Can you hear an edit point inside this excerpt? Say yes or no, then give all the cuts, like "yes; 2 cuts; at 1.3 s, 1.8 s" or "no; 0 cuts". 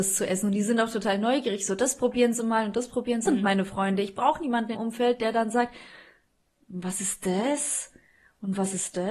yes; 2 cuts; at 3.3 s, 4.7 s